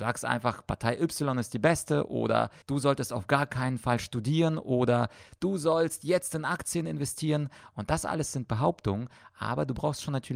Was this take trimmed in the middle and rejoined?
yes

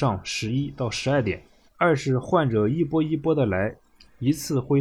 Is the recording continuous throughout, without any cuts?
no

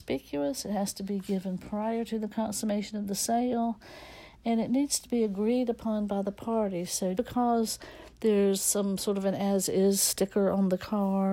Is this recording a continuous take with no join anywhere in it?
no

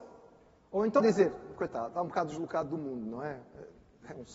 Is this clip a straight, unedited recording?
no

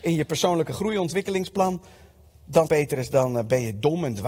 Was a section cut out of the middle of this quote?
yes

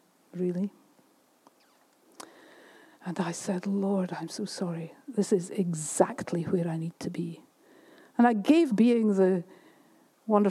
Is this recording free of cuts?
no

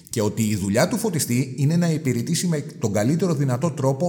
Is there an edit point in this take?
no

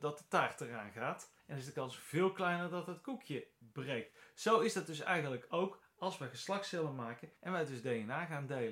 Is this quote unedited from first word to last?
no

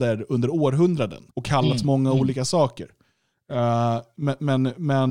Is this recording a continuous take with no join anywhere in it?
no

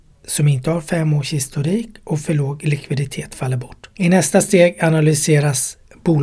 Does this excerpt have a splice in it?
no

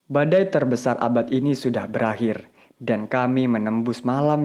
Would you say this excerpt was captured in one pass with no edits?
yes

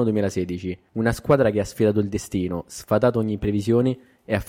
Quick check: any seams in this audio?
no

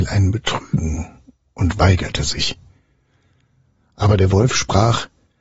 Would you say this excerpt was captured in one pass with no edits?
yes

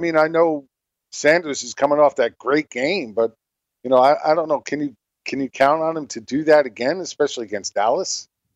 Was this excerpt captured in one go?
yes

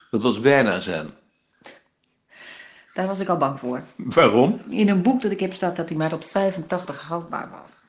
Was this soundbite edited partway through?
no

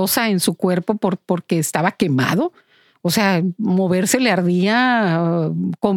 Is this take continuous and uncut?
yes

